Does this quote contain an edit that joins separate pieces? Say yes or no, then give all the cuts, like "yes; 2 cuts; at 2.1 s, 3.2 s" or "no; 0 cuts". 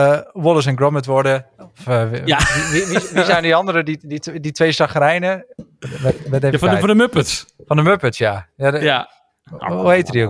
no; 0 cuts